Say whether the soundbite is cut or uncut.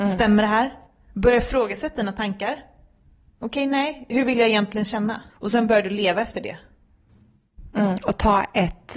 cut